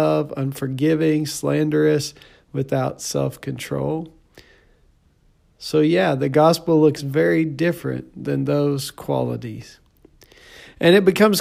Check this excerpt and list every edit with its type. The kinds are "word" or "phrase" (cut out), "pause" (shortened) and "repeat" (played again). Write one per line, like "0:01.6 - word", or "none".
none